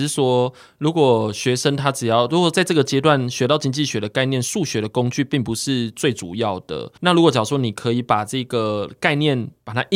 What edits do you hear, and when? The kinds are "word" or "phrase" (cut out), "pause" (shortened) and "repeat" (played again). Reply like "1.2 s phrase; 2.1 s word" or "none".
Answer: 7.0 s pause